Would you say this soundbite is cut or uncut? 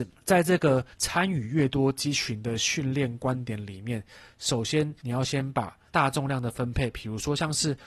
cut